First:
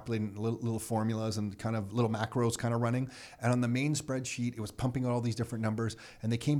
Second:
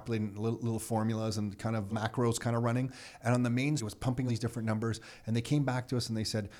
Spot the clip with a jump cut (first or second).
second